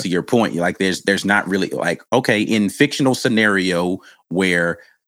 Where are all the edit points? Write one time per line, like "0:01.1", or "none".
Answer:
0:02.0